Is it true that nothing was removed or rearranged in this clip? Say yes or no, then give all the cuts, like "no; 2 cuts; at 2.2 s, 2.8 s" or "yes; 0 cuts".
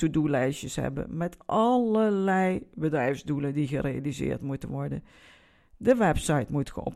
yes; 0 cuts